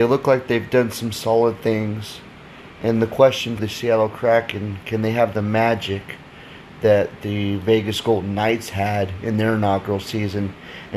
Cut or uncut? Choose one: cut